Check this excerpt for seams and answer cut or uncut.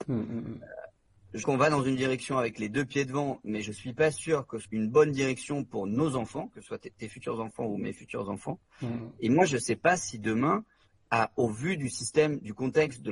cut